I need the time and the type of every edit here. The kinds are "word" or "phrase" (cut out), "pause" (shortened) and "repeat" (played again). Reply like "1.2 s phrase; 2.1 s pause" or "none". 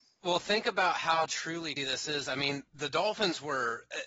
1.8 s word; 2.7 s pause